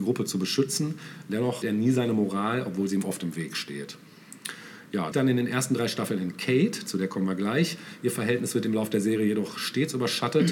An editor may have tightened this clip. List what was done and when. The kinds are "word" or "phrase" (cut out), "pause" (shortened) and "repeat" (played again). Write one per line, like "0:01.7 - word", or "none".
0:01.6 - word
0:05.1 - phrase